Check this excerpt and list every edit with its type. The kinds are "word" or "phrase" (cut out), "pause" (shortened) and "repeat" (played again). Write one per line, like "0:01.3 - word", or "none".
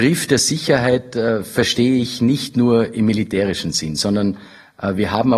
none